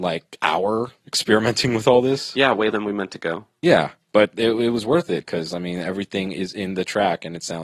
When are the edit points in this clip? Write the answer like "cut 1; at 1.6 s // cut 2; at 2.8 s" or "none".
cut 1; at 2.7 s